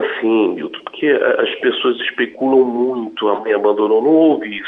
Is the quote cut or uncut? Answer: uncut